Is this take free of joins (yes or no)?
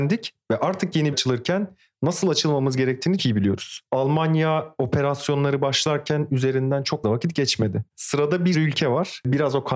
no